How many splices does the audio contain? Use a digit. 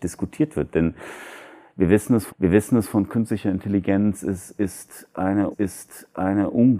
2